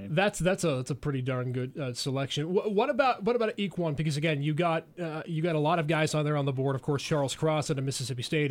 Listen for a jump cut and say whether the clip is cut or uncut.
uncut